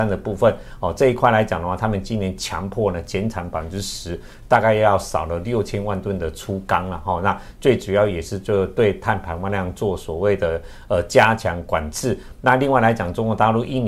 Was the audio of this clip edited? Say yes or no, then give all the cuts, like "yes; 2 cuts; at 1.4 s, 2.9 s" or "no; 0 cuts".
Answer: no; 0 cuts